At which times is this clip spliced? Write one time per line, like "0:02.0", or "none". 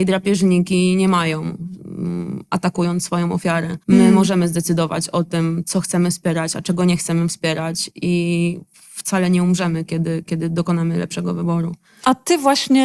0:03.8